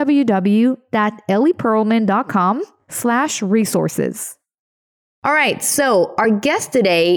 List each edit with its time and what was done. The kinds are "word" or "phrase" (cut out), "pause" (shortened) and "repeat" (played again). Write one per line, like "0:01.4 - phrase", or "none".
none